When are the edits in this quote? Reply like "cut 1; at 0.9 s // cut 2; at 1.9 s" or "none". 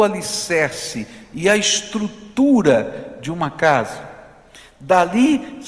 none